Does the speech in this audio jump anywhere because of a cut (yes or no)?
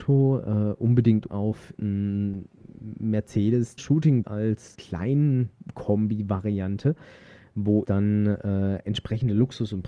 yes